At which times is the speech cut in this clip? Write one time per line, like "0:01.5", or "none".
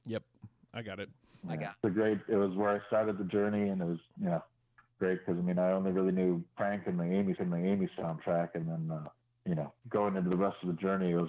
0:01.2
0:07.4
0:09.2